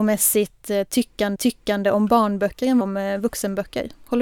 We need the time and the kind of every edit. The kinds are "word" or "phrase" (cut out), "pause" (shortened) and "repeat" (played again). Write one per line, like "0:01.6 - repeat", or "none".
0:01.4 - repeat
0:02.8 - phrase